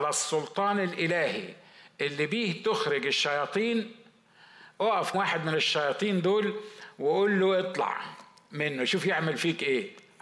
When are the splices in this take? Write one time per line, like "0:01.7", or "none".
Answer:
0:05.1